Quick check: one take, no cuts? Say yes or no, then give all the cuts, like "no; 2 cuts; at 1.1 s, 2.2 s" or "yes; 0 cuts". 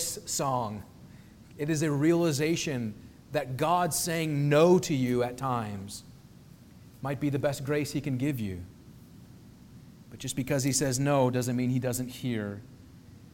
yes; 0 cuts